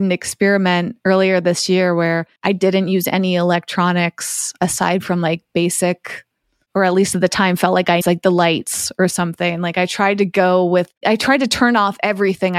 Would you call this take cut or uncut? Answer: cut